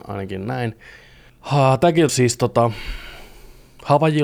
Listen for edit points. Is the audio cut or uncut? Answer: cut